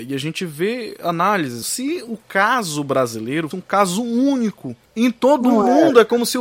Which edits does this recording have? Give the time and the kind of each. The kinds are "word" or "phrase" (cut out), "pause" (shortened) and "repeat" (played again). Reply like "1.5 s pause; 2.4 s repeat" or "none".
1.6 s phrase; 3.5 s word; 4.9 s pause